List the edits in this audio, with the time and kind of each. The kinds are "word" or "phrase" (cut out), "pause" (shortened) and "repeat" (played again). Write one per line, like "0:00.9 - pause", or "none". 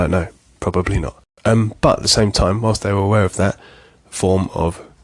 none